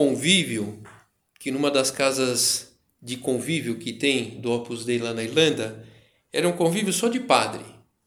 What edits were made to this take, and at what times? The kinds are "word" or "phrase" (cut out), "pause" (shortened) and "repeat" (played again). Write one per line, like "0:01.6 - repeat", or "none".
none